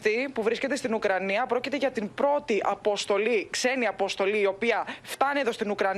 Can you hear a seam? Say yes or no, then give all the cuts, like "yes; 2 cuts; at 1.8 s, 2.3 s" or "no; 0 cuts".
no; 0 cuts